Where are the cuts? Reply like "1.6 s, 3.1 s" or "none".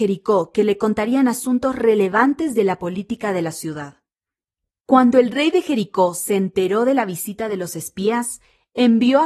none